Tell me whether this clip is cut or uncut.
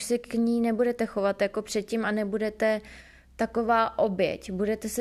uncut